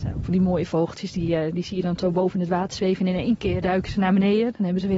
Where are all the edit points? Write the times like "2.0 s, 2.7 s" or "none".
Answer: none